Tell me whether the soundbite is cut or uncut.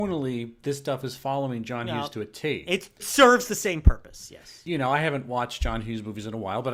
cut